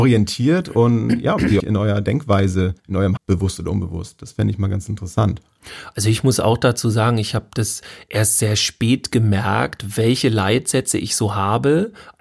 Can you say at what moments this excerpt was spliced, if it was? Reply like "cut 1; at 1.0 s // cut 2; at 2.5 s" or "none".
cut 1; at 1.6 s // cut 2; at 2.8 s // cut 3; at 3.2 s